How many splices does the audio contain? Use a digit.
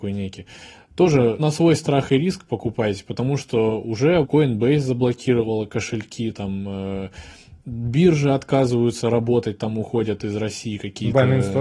2